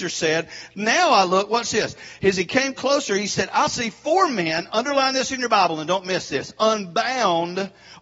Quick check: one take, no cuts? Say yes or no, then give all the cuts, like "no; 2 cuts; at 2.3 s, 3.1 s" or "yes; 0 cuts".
yes; 0 cuts